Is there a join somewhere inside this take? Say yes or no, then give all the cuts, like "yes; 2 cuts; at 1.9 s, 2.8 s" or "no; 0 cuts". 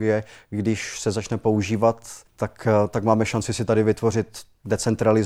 yes; 1 cut; at 2.3 s